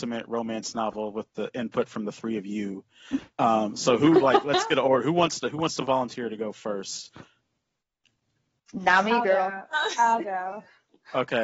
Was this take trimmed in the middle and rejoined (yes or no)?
no